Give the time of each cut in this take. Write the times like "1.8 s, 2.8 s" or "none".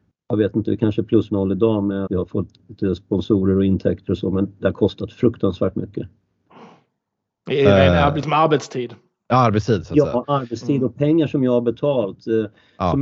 1.3 s, 2.1 s